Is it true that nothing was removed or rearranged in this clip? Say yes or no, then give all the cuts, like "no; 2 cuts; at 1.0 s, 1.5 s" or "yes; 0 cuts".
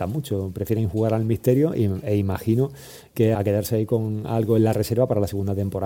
no; 1 cut; at 3.3 s